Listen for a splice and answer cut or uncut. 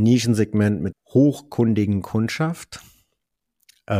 cut